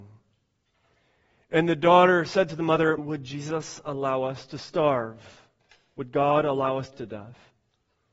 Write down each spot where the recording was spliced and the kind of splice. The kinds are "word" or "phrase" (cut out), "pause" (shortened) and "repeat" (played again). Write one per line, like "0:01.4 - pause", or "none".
0:03.0 - word
0:06.9 - word

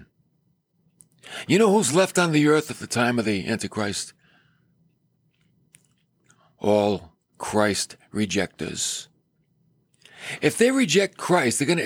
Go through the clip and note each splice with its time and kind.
none

